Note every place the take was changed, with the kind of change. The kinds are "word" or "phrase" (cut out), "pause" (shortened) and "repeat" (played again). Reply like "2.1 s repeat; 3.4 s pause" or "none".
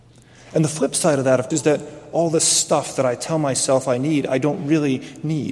1.5 s word